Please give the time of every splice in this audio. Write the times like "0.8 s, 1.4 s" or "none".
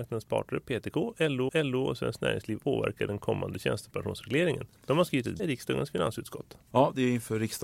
1.5 s, 2.6 s, 4.8 s, 5.4 s, 6.6 s